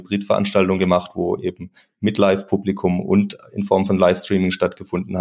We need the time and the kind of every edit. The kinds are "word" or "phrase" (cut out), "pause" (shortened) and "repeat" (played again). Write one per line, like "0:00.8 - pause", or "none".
none